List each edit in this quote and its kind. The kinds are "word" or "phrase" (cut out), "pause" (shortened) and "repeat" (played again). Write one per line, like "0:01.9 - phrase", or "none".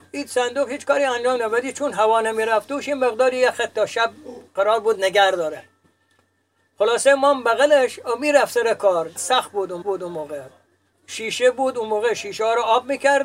0:04.5 - pause
0:09.2 - word
0:09.8 - repeat